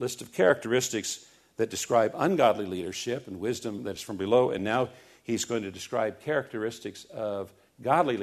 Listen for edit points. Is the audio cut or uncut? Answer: uncut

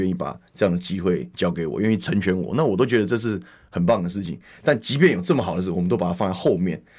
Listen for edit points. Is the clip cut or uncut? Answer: uncut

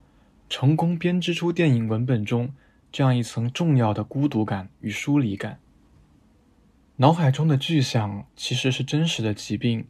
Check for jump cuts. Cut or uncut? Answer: uncut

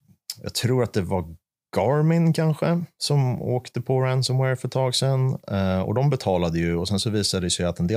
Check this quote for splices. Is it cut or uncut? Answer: uncut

